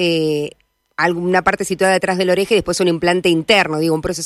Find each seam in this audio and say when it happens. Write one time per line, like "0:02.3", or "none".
none